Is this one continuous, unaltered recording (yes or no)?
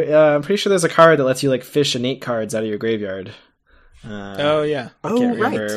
yes